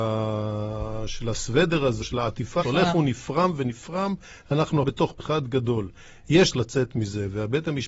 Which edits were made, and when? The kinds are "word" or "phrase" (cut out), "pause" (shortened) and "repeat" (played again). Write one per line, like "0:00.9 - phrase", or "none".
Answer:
0:02.0 - word
0:02.6 - word
0:03.6 - word
0:04.8 - word
0:05.2 - word
0:06.5 - word